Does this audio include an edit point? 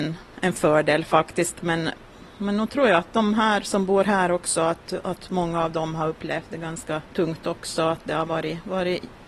yes; 1 cut; at 7.1 s

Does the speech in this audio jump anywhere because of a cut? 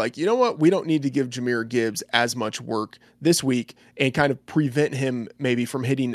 no; 0 cuts

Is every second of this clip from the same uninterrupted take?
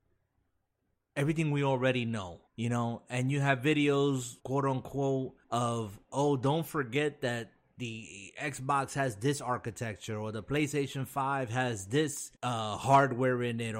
no; 4 cuts; at 2.5 s, 4.4 s, 5.4 s, 12.4 s

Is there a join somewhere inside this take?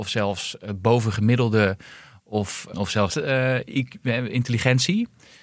yes; 2 cuts; at 2.7 s, 3.1 s

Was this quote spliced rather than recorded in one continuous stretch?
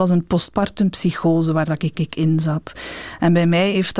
yes; 1 cut; at 1.9 s

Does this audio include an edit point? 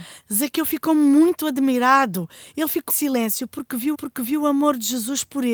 yes; 2 cuts; at 2.9 s, 3.9 s

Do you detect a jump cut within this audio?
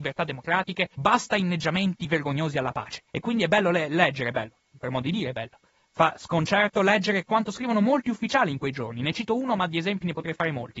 yes; 2 cuts; at 0.9 s, 3.1 s

